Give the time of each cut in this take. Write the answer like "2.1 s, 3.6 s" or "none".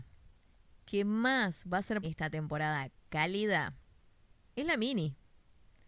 2.0 s

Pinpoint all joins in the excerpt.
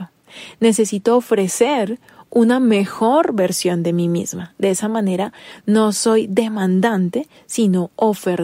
none

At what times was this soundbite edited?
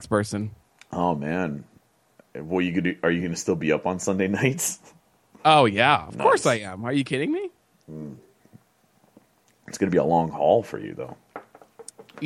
none

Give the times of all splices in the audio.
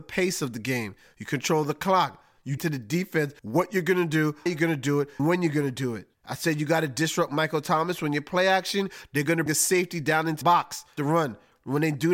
2.6 s, 3.4 s, 4.5 s, 5.2 s, 6.1 s, 9.5 s, 10.4 s, 11.0 s

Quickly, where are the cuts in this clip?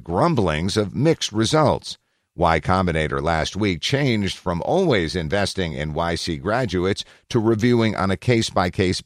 none

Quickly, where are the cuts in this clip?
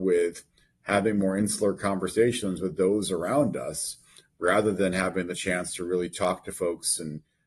none

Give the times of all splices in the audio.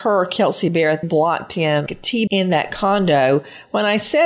1.0 s, 1.9 s, 2.3 s

